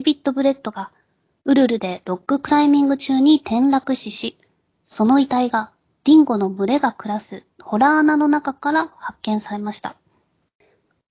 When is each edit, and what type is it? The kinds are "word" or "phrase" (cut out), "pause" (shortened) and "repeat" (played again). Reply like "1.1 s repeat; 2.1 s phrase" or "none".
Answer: none